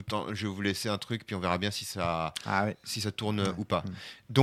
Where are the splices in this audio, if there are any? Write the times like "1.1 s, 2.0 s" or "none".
none